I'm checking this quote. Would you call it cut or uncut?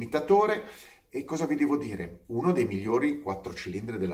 uncut